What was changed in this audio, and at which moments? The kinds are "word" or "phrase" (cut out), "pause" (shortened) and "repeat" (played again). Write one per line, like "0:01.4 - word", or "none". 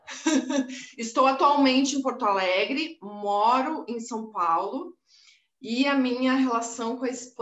none